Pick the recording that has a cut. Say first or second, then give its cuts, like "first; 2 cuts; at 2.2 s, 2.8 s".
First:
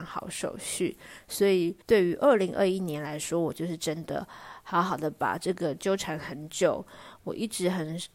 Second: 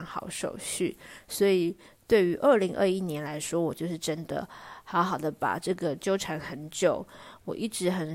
first; 1 cut; at 1.8 s